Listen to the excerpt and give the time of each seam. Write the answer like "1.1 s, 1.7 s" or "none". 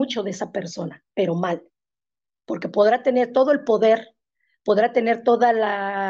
1.1 s